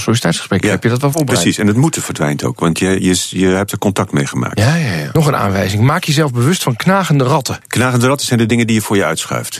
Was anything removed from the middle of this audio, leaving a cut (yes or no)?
no